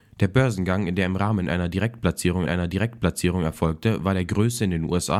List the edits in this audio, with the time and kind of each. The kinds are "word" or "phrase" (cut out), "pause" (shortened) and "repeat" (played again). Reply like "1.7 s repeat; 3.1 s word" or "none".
2.5 s repeat